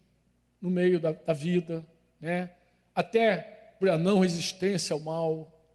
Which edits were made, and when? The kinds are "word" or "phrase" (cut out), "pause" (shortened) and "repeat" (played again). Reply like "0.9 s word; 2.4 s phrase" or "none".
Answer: 3.8 s word